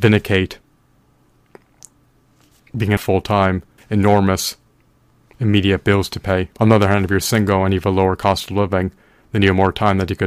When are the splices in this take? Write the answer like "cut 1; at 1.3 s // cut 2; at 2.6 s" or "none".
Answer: cut 1; at 3.0 s // cut 2; at 3.8 s // cut 3; at 6.5 s